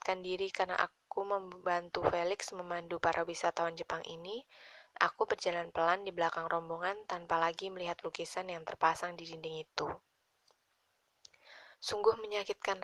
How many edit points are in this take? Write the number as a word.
one